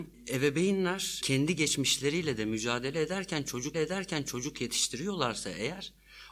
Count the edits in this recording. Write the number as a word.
two